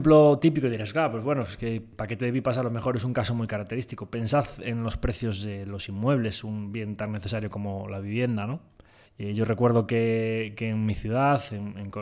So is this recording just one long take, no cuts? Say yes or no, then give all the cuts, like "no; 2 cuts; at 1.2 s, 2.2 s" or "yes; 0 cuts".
yes; 0 cuts